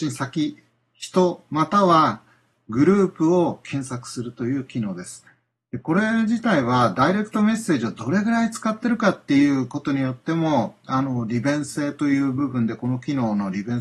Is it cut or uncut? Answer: uncut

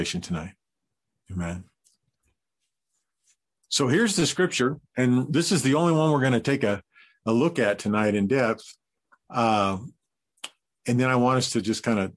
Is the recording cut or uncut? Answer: uncut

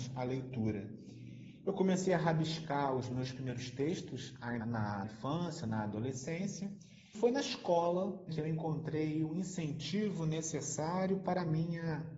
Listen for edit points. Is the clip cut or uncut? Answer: cut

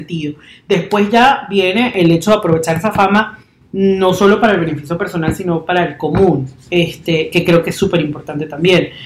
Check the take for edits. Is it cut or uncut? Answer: uncut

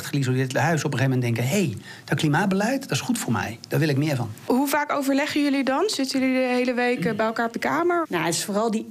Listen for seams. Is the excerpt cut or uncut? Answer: uncut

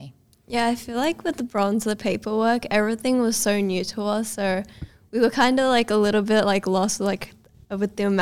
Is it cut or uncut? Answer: uncut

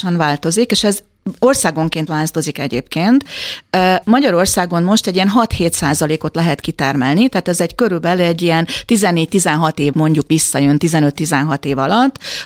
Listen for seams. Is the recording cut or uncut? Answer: cut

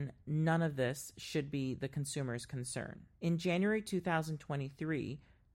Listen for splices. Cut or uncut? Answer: cut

